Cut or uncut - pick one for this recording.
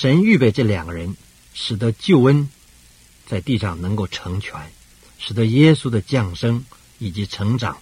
uncut